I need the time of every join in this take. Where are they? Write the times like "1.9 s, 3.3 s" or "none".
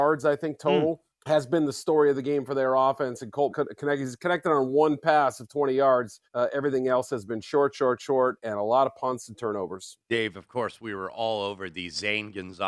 1.1 s, 3.5 s, 6.3 s